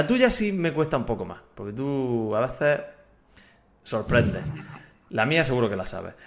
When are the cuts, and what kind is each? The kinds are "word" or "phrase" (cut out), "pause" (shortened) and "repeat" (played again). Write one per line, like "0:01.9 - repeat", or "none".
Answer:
none